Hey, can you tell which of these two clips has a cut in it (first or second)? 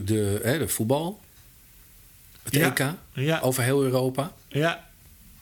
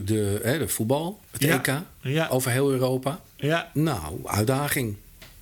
second